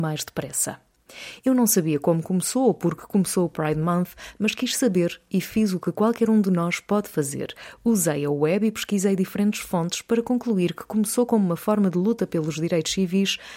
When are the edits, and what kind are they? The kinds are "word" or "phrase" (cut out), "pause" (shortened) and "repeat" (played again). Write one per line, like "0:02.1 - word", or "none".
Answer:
none